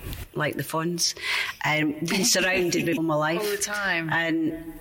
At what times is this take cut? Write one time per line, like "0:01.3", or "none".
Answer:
0:03.0

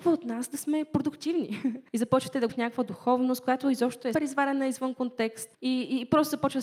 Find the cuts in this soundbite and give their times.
0:01.9
0:02.5
0:04.1
0:05.5

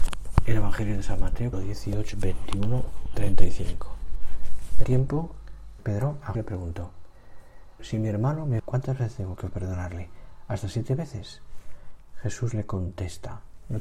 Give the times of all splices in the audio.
0:01.5
0:02.1
0:03.1
0:04.8
0:05.8
0:06.3
0:07.8
0:08.6

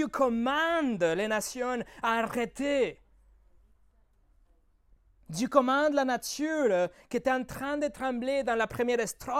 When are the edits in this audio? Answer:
none

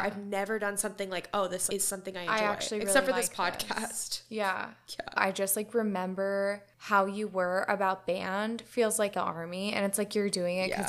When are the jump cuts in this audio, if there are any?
0:01.7
0:09.1

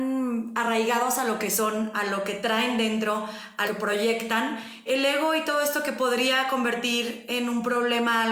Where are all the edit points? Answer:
0:03.6
0:04.9

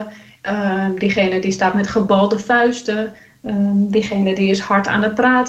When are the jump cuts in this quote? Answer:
none

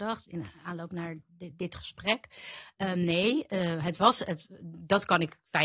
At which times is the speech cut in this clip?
none

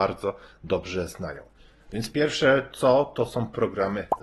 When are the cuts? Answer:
none

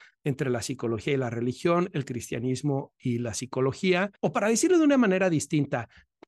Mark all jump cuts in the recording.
0:04.2

